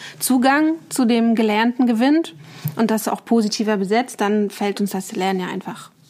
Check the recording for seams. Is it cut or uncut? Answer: uncut